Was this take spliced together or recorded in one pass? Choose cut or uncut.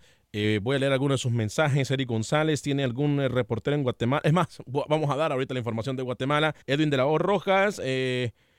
cut